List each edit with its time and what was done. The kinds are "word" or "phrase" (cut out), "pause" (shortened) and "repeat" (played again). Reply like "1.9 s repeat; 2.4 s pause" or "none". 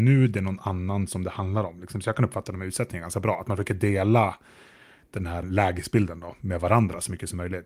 5.4 s word